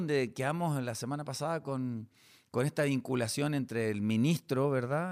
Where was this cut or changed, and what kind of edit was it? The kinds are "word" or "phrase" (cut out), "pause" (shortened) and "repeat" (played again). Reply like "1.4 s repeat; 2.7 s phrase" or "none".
none